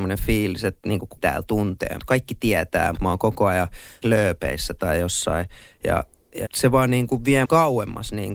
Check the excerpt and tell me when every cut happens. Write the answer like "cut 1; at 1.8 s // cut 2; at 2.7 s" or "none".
cut 1; at 1.2 s // cut 2; at 2.0 s // cut 3; at 2.9 s // cut 4; at 4.0 s // cut 5; at 6.4 s // cut 6; at 7.4 s